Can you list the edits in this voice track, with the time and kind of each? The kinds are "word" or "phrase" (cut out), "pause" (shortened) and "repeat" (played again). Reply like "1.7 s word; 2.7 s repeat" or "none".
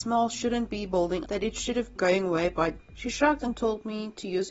1.2 s word; 2.0 s word; 2.8 s word